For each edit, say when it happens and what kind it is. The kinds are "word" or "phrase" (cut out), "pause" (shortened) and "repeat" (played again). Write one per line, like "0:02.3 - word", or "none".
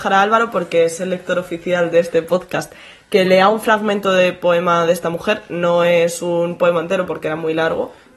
none